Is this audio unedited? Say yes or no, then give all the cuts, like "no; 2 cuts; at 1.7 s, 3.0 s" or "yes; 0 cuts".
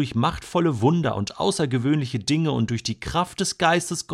yes; 0 cuts